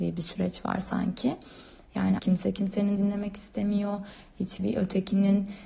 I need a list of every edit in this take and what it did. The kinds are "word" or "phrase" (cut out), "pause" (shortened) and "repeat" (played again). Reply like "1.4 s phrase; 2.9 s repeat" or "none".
2.2 s word; 3.0 s word; 4.6 s word